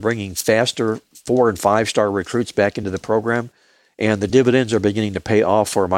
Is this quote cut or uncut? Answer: uncut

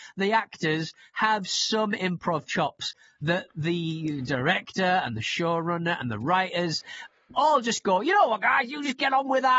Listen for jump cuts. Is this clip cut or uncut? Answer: uncut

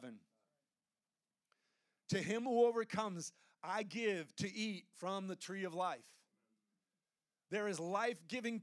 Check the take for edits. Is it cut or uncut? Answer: uncut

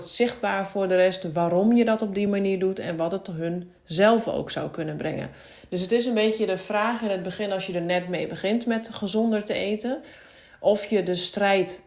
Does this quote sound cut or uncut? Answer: uncut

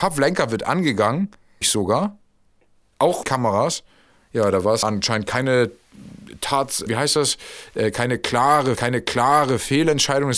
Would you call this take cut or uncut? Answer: cut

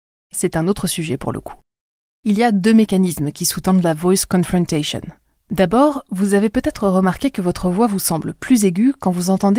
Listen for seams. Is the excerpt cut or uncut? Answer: uncut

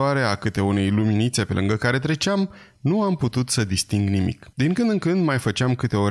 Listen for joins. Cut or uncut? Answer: cut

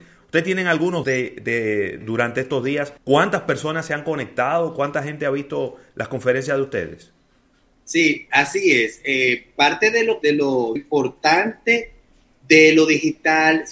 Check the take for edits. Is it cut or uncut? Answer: cut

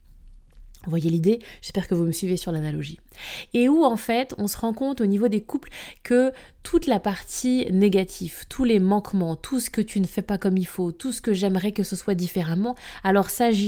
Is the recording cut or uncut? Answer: uncut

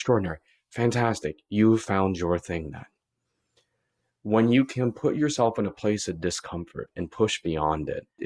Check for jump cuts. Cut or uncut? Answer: uncut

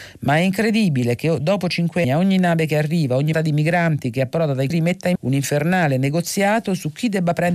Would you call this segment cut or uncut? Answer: cut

